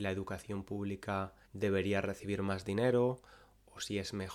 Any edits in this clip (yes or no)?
yes